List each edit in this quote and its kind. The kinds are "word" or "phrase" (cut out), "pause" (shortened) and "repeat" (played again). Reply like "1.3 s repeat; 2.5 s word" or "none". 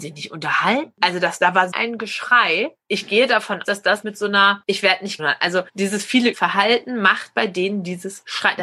1.7 s word; 3.6 s word; 4.0 s word; 5.2 s phrase; 5.7 s pause; 6.3 s word